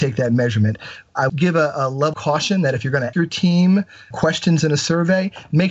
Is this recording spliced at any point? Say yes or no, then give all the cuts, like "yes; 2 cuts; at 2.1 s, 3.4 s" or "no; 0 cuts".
yes; 4 cuts; at 1.3 s, 2.1 s, 3.1 s, 4.1 s